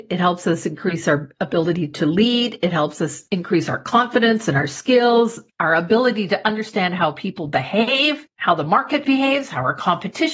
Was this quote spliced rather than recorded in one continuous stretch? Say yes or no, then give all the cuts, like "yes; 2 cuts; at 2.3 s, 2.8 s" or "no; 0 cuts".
no; 0 cuts